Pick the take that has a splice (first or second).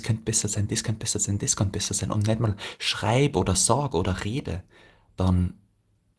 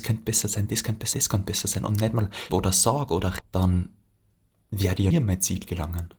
second